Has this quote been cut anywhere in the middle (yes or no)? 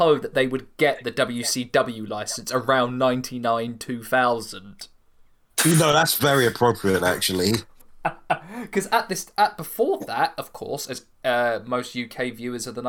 no